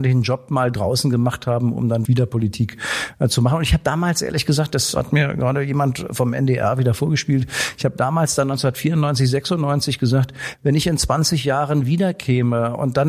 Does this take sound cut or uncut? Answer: cut